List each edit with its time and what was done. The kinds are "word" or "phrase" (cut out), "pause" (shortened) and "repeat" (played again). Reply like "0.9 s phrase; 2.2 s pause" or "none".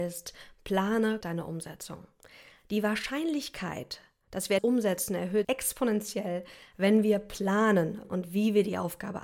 1.2 s word; 4.6 s word; 5.4 s word; 8.0 s word